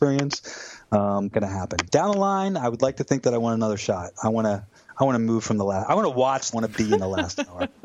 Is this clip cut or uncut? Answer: cut